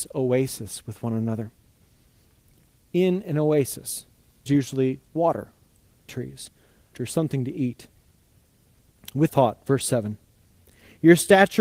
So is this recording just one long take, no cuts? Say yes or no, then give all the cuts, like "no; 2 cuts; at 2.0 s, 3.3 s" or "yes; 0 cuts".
no; 4 cuts; at 4.5 s, 6.1 s, 6.9 s, 9.3 s